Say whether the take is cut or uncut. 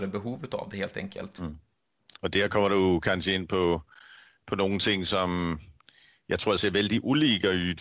uncut